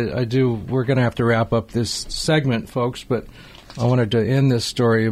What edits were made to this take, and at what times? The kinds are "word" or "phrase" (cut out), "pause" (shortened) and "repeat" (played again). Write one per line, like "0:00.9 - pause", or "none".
none